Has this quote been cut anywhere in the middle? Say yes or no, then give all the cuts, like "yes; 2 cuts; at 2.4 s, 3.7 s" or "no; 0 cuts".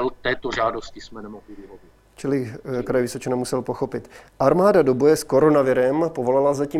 no; 0 cuts